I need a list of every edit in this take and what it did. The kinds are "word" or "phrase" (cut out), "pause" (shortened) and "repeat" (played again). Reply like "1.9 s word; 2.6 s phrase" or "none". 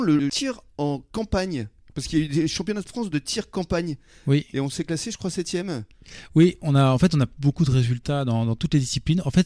none